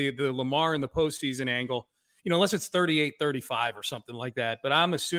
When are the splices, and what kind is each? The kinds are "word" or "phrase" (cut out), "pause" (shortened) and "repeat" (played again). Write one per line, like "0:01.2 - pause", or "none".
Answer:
none